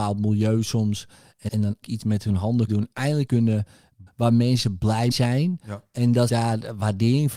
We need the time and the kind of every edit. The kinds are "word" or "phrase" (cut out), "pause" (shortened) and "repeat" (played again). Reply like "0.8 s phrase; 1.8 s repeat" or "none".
1.5 s word; 1.8 s word; 2.7 s word; 3.3 s word; 4.1 s word; 5.1 s word; 6.3 s word